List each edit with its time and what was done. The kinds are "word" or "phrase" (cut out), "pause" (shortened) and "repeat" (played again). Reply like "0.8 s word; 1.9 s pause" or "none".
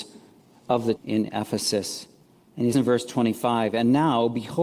1.0 s word; 2.7 s word